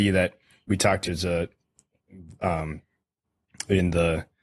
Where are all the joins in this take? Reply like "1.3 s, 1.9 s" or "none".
1.1 s